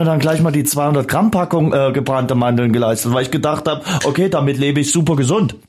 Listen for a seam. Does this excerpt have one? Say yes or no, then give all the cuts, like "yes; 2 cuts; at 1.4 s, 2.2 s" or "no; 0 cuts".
no; 0 cuts